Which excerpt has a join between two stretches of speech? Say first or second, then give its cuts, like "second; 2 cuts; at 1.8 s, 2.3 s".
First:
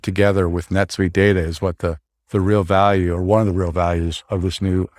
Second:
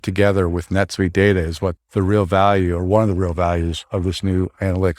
second; 1 cut; at 1.8 s